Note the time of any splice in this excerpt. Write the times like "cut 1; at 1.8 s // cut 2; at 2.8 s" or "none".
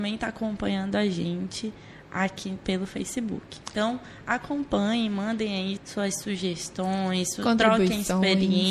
cut 1; at 5.8 s